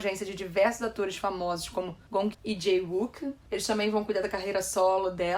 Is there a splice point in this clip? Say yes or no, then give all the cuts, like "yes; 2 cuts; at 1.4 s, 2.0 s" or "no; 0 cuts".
yes; 1 cut; at 2.3 s